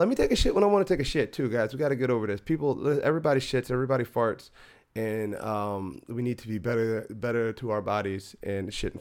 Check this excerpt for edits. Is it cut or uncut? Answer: uncut